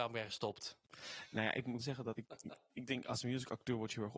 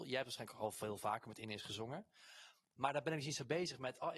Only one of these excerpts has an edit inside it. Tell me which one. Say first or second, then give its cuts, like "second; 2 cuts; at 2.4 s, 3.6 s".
first; 2 cuts; at 1.8 s, 2.1 s